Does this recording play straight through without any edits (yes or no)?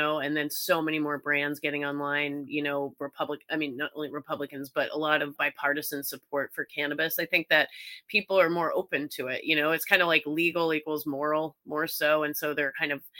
no